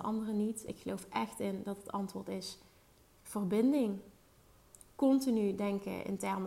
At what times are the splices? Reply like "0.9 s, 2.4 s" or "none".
none